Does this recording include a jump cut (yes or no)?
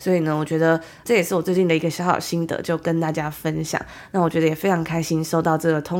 yes